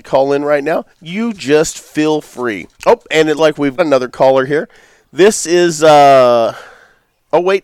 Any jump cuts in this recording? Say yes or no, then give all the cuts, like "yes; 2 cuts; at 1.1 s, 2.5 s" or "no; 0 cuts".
yes; 4 cuts; at 0.9 s, 2.7 s, 3.4 s, 3.8 s